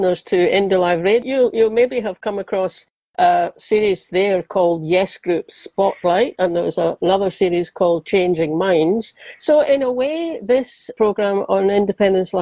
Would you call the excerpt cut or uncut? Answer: uncut